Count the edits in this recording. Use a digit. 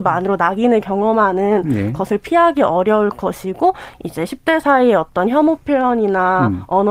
0